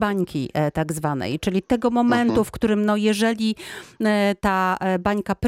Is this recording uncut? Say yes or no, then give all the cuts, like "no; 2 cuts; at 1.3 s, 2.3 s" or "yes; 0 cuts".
yes; 0 cuts